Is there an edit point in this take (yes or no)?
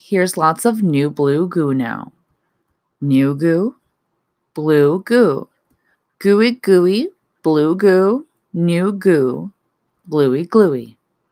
no